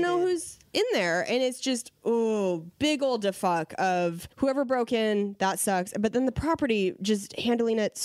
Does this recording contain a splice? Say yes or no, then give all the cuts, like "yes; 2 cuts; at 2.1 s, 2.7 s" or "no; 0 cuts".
yes; 1 cut; at 4.3 s